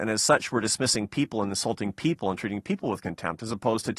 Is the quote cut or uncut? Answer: uncut